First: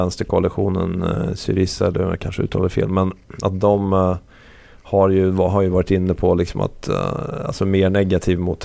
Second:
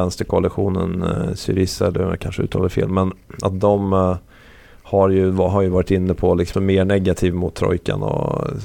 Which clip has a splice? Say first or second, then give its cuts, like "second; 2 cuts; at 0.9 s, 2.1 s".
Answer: second; 1 cut; at 6.5 s